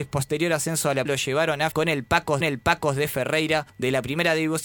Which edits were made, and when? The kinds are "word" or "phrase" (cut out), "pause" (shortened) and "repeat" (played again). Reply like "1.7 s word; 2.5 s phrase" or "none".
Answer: 1.1 s word; 1.7 s word; 2.4 s repeat; 3.7 s pause